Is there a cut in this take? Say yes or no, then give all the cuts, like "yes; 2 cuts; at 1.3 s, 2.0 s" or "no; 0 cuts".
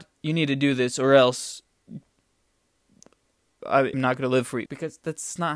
yes; 3 cuts; at 3.6 s, 3.9 s, 4.7 s